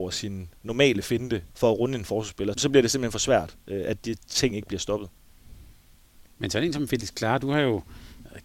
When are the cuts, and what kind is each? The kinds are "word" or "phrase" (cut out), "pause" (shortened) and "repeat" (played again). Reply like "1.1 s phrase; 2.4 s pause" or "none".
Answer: 1.5 s pause; 2.5 s word